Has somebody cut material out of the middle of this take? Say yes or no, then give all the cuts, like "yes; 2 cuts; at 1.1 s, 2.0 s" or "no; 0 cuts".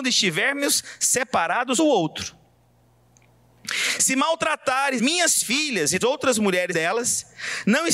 yes; 4 cuts; at 1.8 s, 5.0 s, 6.0 s, 6.7 s